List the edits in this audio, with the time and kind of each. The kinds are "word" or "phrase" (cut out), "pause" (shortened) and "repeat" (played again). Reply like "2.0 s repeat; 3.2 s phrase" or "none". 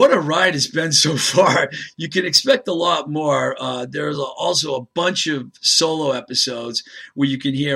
none